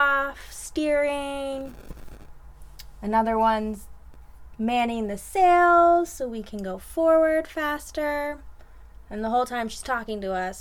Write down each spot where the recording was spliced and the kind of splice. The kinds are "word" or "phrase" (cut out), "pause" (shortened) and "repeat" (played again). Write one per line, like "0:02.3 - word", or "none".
none